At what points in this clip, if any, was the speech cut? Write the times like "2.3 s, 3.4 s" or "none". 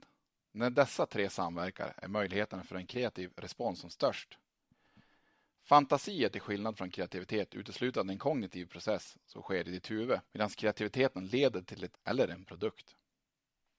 10.3 s, 11.9 s